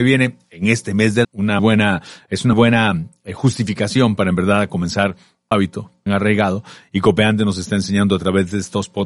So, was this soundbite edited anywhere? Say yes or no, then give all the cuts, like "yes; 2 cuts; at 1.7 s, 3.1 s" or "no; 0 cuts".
yes; 5 cuts; at 1.2 s, 1.6 s, 2.5 s, 5.5 s, 6.1 s